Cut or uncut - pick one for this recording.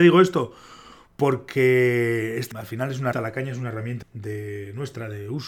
cut